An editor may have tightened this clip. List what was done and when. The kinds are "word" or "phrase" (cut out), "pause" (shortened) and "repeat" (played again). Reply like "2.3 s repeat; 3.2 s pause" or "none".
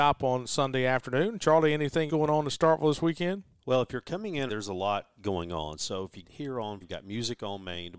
2.1 s word; 4.5 s word; 6.2 s word; 6.8 s word